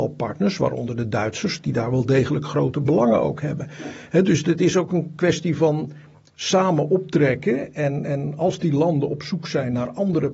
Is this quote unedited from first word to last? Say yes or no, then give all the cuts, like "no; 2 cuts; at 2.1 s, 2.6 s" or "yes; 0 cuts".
yes; 0 cuts